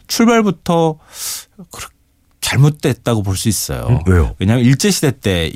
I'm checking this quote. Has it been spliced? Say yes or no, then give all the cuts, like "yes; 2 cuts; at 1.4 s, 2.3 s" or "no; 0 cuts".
no; 0 cuts